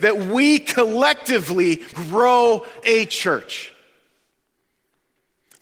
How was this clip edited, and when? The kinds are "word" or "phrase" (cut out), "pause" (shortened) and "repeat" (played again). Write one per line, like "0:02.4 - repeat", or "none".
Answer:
0:01.9 - word
0:02.8 - word